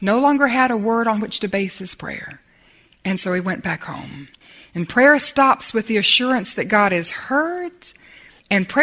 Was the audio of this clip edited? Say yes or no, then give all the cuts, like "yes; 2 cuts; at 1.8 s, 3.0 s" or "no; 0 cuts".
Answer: no; 0 cuts